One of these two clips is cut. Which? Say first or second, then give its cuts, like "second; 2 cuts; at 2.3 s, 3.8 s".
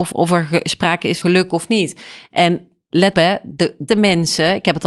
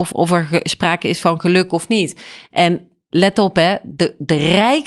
first; 3 cuts; at 1.2 s, 3.1 s, 3.9 s